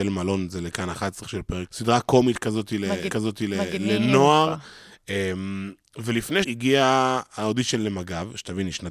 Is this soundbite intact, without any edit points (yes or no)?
no